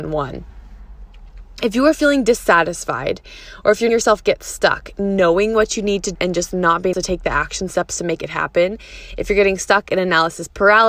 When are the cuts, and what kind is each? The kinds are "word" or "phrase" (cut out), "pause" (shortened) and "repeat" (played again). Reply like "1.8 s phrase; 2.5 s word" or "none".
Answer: 3.9 s word; 6.1 s word; 6.9 s word